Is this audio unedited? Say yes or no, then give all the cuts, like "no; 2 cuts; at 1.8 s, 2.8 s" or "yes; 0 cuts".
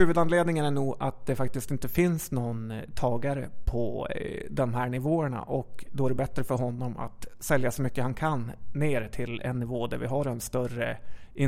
yes; 0 cuts